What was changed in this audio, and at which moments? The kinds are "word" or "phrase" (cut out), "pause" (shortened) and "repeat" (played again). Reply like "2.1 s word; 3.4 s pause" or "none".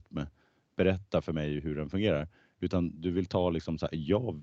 none